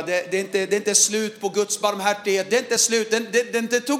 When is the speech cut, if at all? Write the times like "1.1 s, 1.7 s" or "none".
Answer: none